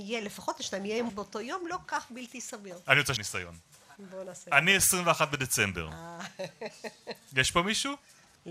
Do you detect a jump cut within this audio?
yes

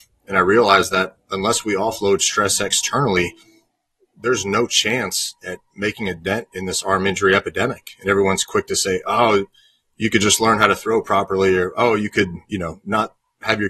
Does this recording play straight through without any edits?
yes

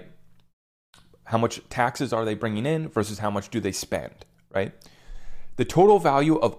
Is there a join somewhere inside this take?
no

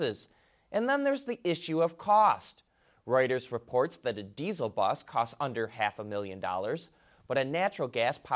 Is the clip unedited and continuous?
yes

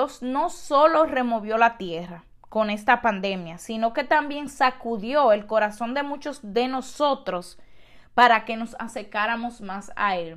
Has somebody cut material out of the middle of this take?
no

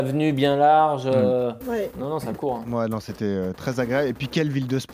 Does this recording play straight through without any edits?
yes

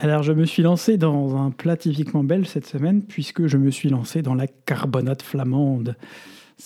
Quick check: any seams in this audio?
no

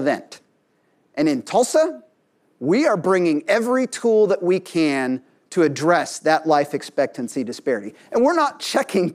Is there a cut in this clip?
no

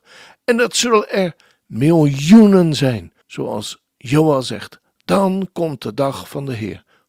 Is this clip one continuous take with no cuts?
no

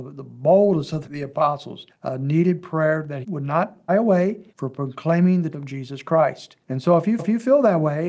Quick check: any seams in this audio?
yes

